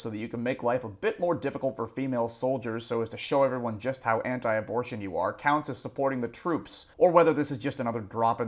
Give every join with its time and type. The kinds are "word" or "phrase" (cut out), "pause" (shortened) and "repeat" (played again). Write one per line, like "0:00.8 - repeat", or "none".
0:06.9 - pause